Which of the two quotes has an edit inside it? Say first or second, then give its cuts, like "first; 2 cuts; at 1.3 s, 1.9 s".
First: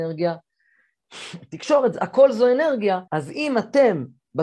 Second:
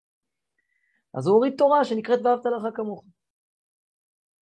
first; 1 cut; at 3.1 s